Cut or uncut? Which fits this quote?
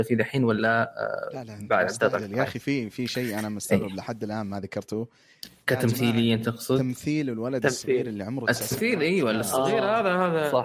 uncut